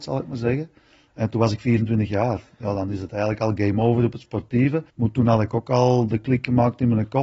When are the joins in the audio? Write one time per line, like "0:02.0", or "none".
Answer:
0:04.9